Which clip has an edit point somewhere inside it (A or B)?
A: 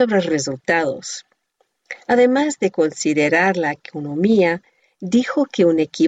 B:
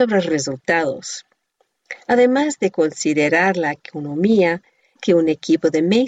B